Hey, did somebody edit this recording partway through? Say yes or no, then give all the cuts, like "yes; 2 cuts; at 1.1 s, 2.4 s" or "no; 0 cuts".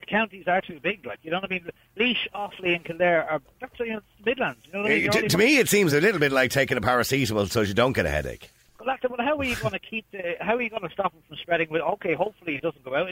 no; 0 cuts